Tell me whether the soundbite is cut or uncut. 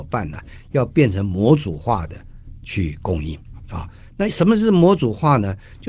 uncut